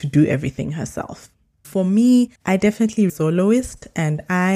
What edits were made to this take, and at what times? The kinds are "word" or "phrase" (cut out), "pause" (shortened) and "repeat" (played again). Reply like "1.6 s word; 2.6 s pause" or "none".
2.4 s pause; 3.1 s phrase